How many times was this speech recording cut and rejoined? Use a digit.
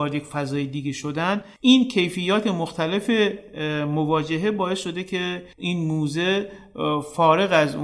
2